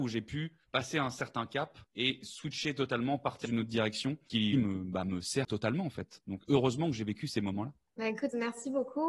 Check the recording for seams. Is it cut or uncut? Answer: cut